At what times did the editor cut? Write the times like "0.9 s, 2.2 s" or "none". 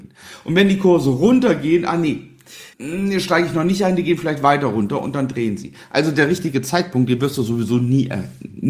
2.7 s